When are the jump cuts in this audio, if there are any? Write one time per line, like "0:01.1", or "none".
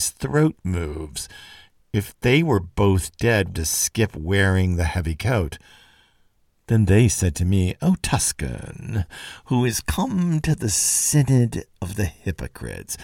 0:03.5